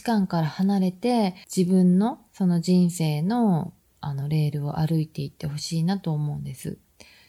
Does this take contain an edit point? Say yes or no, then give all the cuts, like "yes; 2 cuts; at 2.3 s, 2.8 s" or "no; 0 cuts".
yes; 1 cut; at 1.4 s